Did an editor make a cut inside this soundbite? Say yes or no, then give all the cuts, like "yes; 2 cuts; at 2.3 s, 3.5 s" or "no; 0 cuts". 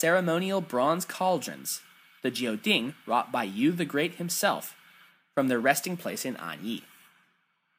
no; 0 cuts